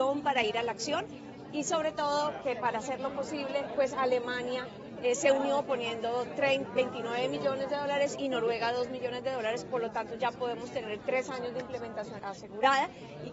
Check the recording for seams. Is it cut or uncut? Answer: uncut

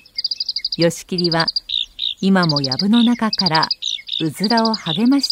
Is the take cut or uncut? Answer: uncut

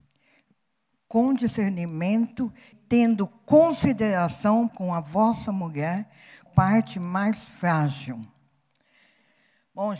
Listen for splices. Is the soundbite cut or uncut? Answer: cut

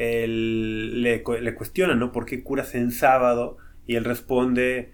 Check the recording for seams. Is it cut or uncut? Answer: uncut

